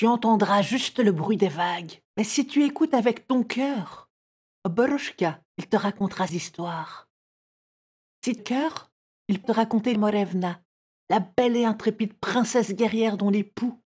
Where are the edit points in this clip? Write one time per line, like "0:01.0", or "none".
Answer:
0:02.1
0:05.5
0:06.3
0:08.4
0:09.4
0:10.0